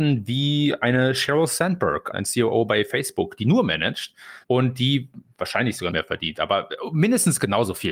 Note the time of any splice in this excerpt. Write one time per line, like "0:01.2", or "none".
0:02.1
0:04.4
0:05.9